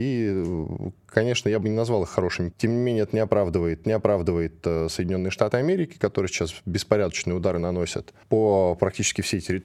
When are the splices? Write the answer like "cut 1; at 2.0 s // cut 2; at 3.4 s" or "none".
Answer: cut 1; at 2.5 s // cut 2; at 3.8 s // cut 3; at 8.2 s